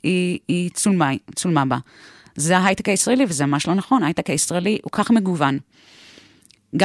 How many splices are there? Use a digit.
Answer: 1